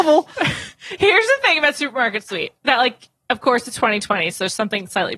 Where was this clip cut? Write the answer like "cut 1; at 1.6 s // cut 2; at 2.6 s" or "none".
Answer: cut 1; at 2.6 s